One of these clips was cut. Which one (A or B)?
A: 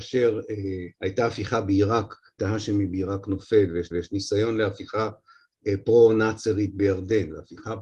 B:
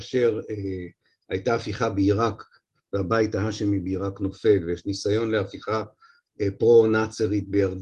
A